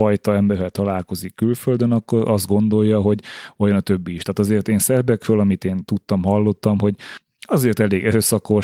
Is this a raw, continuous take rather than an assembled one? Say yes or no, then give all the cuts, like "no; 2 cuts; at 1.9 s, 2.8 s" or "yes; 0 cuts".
yes; 0 cuts